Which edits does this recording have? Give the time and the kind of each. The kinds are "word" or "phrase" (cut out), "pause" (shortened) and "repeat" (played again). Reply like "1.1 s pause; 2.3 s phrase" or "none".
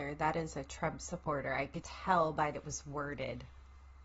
1.8 s word; 2.5 s word